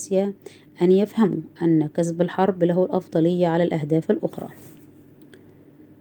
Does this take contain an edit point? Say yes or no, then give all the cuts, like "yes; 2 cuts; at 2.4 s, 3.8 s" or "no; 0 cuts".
no; 0 cuts